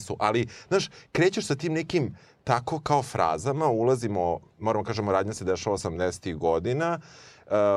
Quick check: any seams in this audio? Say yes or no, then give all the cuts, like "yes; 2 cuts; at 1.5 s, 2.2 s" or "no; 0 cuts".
no; 0 cuts